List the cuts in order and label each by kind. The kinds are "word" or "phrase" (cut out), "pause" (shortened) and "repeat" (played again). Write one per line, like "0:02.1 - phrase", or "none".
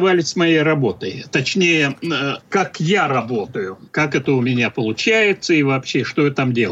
0:02.5 - pause
0:03.9 - pause